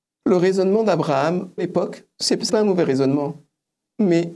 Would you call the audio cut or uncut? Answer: cut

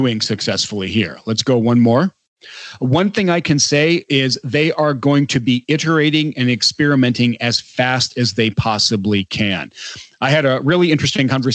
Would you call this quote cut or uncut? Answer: uncut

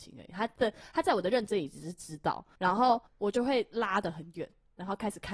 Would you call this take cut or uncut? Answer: cut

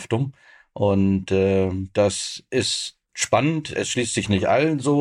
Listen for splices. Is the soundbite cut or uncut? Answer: uncut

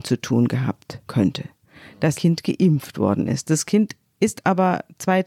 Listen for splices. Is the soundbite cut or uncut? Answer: cut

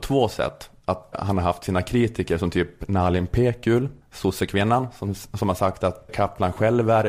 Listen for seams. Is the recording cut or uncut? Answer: cut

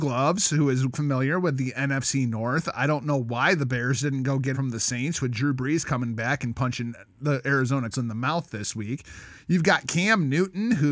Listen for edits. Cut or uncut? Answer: cut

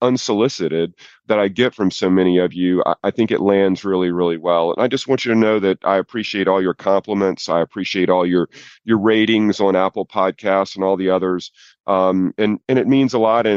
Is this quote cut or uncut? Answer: uncut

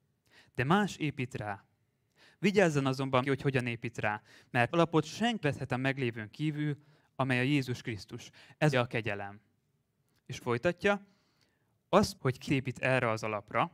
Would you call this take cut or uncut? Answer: cut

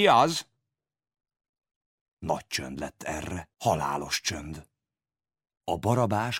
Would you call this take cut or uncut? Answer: cut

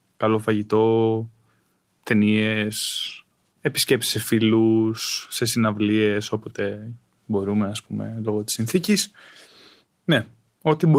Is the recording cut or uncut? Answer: uncut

